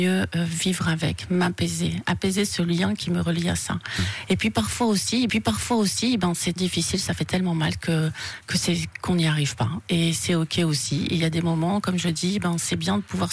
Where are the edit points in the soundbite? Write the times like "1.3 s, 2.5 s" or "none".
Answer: 5.3 s, 6.6 s

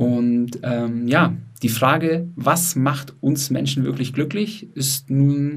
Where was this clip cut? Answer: none

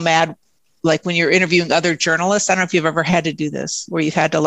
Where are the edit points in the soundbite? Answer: none

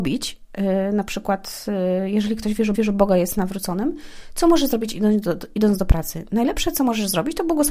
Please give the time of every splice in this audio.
2.7 s

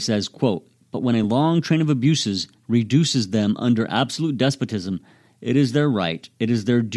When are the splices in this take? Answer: none

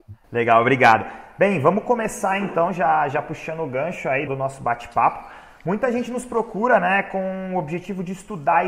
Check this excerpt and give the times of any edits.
4.3 s

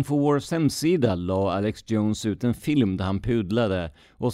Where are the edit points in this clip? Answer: none

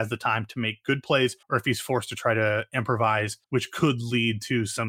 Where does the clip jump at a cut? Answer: 1.4 s, 3.4 s

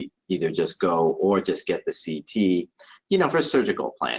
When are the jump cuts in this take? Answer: none

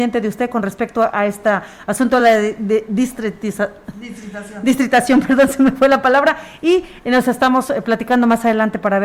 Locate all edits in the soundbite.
none

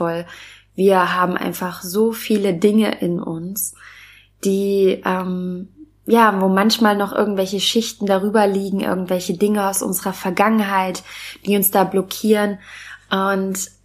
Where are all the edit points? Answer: none

